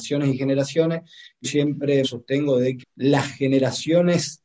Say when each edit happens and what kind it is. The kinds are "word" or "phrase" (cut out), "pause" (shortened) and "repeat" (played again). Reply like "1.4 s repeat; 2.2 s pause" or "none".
1.4 s word; 2.0 s word; 2.8 s word